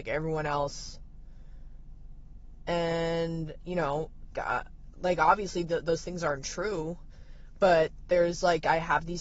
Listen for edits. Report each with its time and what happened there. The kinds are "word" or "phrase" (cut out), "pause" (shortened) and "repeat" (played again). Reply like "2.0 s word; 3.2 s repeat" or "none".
4.3 s word